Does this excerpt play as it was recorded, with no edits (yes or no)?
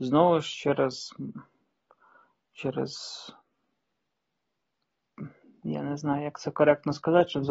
yes